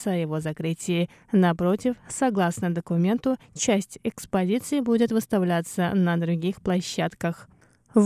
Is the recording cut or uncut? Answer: uncut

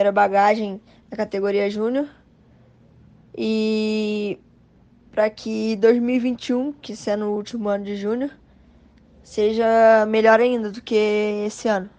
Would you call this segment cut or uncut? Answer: uncut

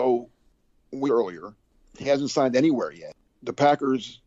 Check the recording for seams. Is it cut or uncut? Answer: cut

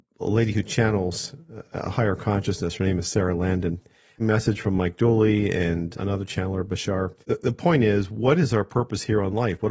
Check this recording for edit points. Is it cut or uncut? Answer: cut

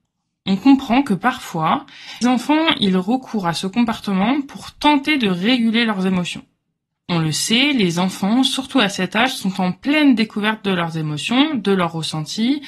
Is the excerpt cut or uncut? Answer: cut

